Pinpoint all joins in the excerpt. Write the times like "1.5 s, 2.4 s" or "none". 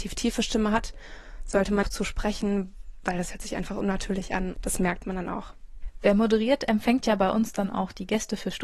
1.8 s, 4.5 s